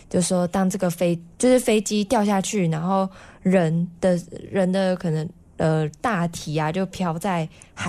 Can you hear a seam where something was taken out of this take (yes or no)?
no